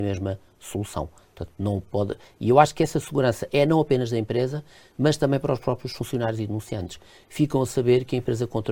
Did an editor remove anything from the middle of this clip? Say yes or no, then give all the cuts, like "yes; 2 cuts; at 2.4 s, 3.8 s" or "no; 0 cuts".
no; 0 cuts